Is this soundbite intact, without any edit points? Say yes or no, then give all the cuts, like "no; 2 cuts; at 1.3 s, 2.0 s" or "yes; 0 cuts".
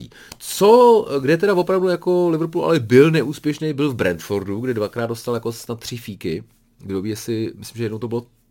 yes; 0 cuts